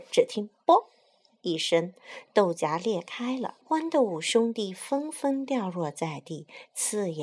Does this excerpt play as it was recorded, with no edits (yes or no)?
no